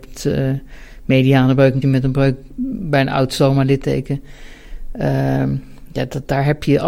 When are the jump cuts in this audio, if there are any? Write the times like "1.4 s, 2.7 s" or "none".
1.8 s